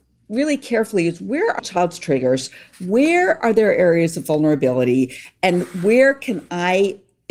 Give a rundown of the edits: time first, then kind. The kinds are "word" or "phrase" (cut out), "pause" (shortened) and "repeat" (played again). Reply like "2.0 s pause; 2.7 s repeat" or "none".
1.6 s word